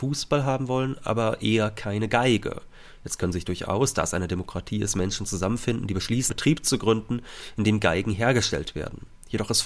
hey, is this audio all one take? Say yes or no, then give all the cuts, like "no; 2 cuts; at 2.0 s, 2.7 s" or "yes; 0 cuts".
no; 1 cut; at 6.3 s